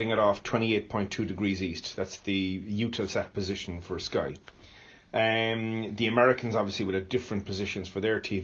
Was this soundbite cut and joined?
no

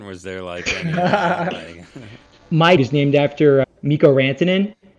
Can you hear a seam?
yes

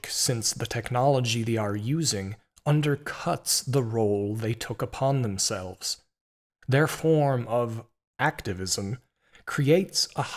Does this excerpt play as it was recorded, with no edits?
yes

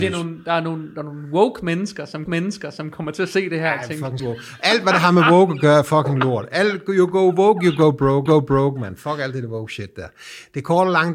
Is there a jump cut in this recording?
yes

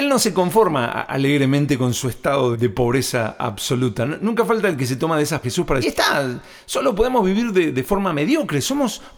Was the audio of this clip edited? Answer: yes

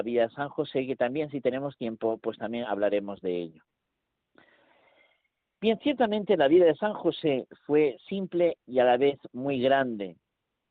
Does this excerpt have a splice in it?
no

